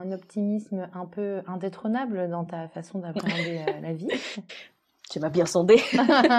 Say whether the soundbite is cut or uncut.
uncut